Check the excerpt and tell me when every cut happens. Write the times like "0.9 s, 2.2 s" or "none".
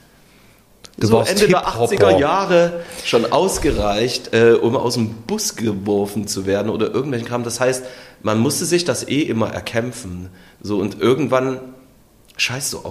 0.9 s